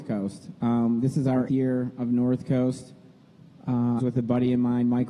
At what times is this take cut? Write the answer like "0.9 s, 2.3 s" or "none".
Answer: 1.5 s, 4.0 s